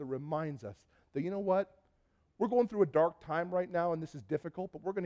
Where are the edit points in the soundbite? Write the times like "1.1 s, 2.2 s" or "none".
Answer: none